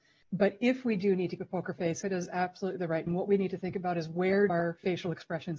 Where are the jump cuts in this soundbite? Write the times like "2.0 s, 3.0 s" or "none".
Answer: 1.4 s, 2.0 s, 3.1 s, 4.5 s